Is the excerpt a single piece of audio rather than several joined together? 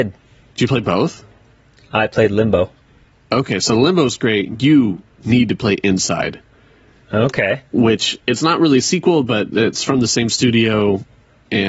yes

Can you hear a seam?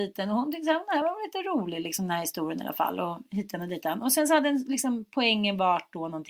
no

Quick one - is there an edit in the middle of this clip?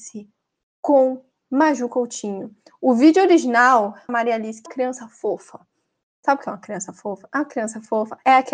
yes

